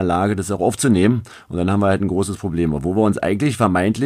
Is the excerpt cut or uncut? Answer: uncut